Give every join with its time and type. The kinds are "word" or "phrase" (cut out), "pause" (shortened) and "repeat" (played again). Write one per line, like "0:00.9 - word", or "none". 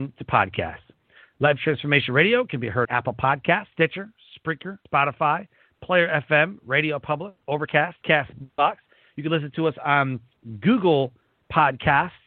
0:02.8 - word
0:03.7 - pause
0:04.9 - pause
0:07.4 - pause